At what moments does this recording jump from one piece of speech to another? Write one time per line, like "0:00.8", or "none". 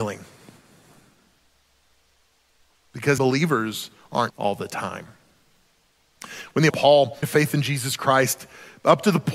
0:03.2
0:04.3
0:06.7
0:07.2